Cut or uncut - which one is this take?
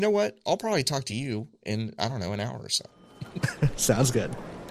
uncut